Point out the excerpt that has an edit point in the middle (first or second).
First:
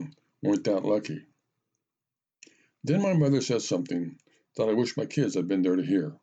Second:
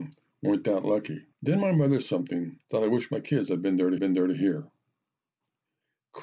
second